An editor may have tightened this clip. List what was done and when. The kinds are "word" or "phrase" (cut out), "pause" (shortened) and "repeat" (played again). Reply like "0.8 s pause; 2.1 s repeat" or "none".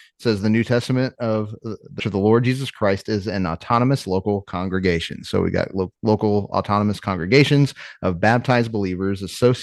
2.0 s phrase; 6.0 s pause